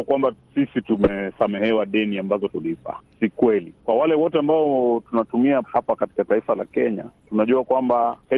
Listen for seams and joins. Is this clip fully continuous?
no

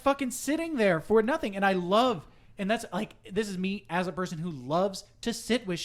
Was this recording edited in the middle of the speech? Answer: no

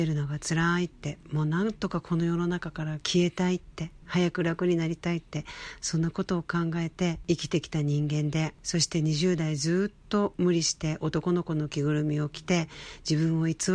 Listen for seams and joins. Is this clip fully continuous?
no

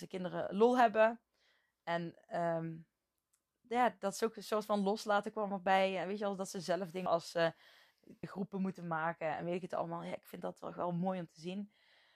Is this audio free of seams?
no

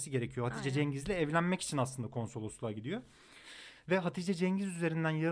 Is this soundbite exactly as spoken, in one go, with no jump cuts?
yes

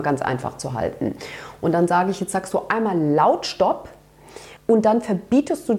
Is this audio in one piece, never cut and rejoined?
no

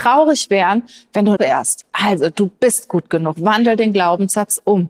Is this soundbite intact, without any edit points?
no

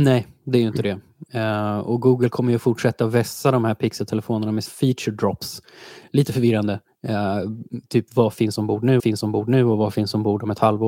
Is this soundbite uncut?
no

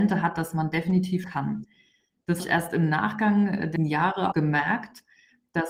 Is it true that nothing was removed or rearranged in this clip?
no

